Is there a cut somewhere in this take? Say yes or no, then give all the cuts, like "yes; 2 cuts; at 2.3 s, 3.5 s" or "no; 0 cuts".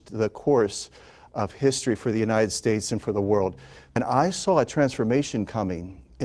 no; 0 cuts